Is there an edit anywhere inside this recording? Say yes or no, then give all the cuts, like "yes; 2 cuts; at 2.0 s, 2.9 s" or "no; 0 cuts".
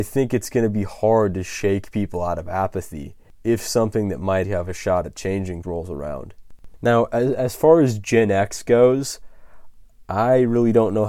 yes; 2 cuts; at 4.4 s, 5.6 s